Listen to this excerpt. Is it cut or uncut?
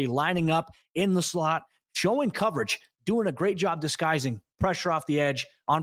uncut